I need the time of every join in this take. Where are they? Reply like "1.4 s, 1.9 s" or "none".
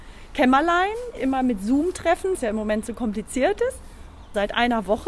1.2 s, 2.3 s